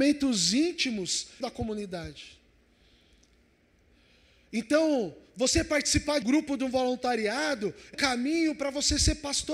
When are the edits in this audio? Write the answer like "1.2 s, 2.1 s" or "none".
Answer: 1.4 s, 6.2 s, 7.9 s